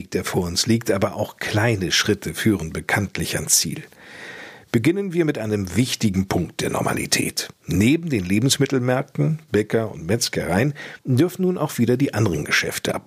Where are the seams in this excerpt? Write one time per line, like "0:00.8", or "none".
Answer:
0:07.5
0:11.0